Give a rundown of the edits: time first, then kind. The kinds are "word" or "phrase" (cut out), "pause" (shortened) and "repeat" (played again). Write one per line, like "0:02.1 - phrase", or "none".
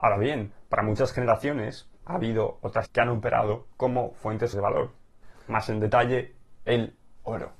0:02.0 - pause
0:02.9 - phrase
0:04.5 - phrase